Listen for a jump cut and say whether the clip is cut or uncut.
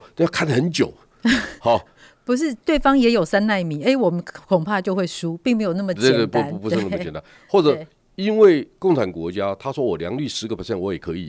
uncut